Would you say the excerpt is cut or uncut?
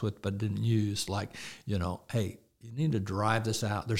uncut